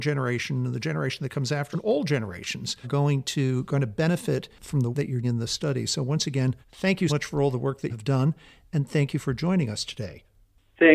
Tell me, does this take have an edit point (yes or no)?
yes